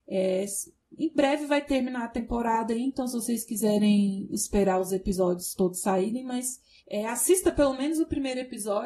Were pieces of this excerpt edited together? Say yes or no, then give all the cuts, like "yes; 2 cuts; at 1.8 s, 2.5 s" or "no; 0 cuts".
yes; 1 cut; at 6.8 s